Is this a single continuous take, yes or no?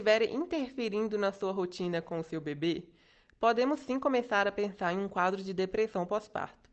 yes